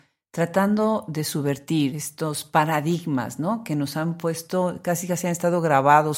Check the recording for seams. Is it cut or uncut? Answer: cut